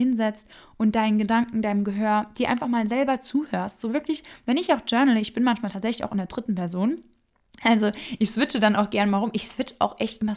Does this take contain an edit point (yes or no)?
no